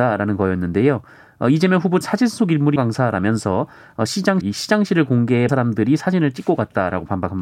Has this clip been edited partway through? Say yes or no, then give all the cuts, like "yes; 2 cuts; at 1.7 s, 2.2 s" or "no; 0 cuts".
yes; 4 cuts; at 2.0 s, 2.8 s, 4.4 s, 5.5 s